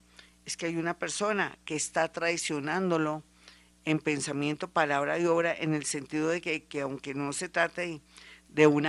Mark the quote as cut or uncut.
uncut